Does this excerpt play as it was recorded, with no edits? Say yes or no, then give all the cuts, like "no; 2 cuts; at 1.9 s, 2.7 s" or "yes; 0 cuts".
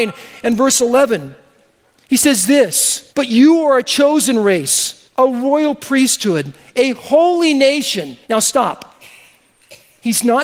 no; 3 cuts; at 3.1 s, 5.1 s, 8.2 s